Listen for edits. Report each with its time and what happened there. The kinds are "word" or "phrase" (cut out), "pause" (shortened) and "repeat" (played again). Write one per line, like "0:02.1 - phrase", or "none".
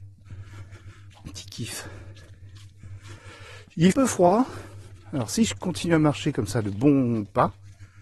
0:01.3 - phrase
0:03.9 - phrase